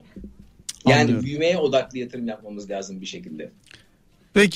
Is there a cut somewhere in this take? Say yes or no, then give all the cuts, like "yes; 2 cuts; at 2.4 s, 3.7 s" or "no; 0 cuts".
no; 0 cuts